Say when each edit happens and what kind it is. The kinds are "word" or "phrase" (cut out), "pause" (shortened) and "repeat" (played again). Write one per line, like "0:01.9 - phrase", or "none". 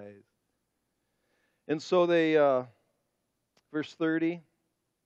none